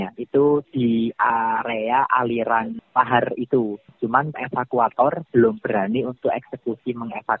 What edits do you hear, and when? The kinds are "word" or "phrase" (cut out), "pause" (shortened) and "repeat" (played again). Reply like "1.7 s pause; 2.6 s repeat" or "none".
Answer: 4.3 s word